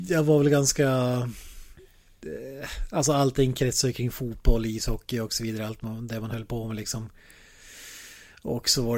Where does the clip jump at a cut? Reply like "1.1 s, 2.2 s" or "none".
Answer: none